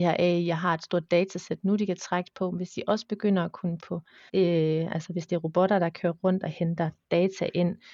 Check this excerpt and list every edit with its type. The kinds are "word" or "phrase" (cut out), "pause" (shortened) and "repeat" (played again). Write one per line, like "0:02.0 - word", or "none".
0:03.8 - word
0:04.3 - word